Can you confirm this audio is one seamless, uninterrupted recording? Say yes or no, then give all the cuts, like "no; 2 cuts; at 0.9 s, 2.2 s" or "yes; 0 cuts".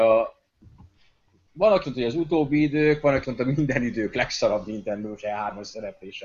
no; 2 cuts; at 1.8 s, 3.2 s